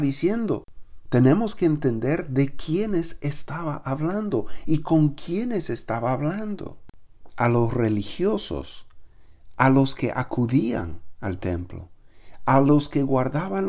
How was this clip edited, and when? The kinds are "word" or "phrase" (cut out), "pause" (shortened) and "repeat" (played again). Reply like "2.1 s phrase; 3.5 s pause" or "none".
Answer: none